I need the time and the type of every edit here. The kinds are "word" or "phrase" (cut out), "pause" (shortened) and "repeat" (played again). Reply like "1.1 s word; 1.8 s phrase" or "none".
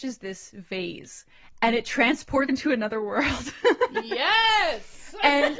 2.5 s word

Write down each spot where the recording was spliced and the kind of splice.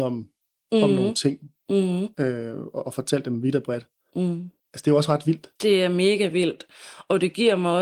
2.1 s pause; 4.6 s pause; 5.6 s pause

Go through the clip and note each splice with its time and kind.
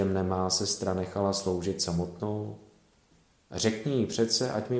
none

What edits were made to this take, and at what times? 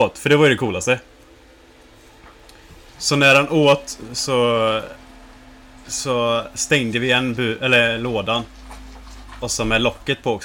none

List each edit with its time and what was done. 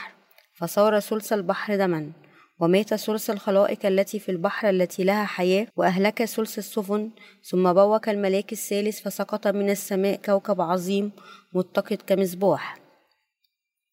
5.7 s pause

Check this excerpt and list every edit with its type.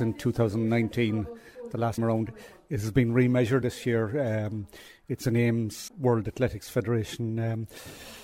2.0 s word; 3.6 s word; 5.9 s word

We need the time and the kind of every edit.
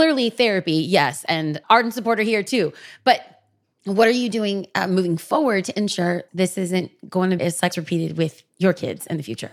1.6 s word; 6.3 s word; 7.4 s word; 7.7 s word

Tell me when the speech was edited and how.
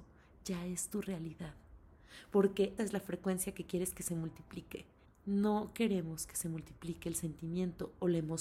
2.8 s word; 5.1 s pause

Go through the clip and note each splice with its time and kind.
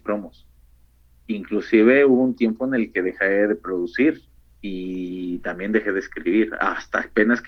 4.4 s pause; 6.5 s phrase

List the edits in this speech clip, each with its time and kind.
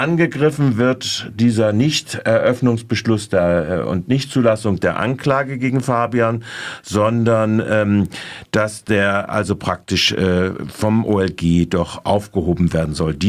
none

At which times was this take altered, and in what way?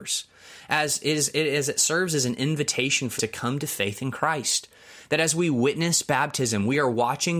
3.2 s word

